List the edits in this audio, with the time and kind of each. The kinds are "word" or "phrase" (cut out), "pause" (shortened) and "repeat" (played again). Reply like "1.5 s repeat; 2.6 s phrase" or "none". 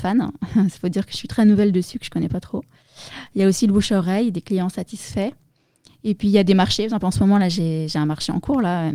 none